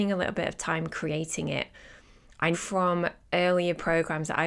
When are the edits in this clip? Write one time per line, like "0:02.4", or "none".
0:02.5